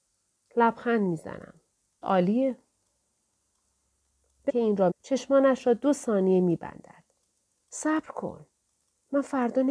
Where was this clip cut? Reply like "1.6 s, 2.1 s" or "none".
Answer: 2.0 s, 4.5 s, 4.9 s